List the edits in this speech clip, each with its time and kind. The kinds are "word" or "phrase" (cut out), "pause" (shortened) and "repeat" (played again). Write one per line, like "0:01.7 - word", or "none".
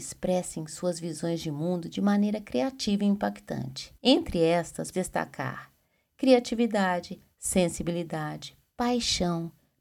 0:04.0 - pause
0:04.9 - word